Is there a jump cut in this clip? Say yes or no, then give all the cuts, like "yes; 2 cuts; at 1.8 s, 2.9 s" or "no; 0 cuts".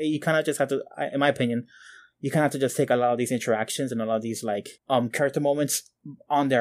no; 0 cuts